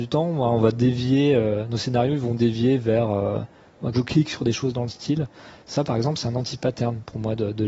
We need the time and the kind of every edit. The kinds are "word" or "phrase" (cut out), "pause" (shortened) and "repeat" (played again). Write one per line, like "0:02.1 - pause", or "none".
0:03.9 - word